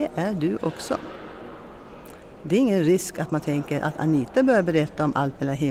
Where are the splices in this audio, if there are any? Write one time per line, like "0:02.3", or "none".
none